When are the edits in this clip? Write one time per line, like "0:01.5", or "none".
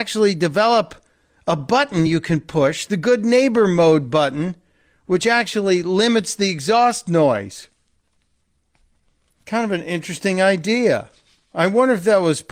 none